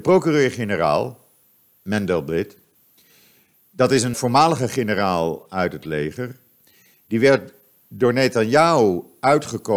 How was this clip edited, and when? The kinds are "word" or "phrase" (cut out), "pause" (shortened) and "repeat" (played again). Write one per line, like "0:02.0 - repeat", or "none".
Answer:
0:04.1 - word